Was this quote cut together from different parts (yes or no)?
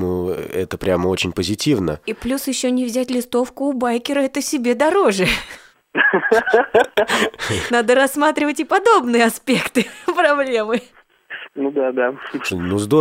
no